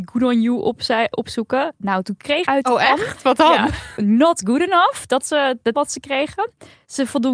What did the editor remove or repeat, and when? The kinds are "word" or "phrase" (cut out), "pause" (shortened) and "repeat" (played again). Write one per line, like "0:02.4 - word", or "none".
0:01.1 - word
0:02.4 - phrase
0:04.0 - word
0:05.2 - phrase
0:05.7 - word